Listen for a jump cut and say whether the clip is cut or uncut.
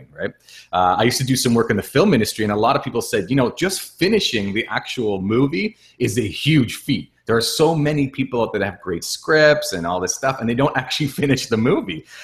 uncut